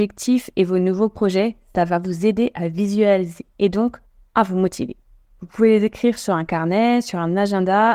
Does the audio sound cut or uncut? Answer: uncut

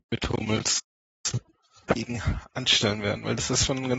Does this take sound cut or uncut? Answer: uncut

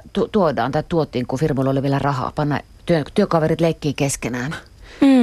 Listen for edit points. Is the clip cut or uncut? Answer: uncut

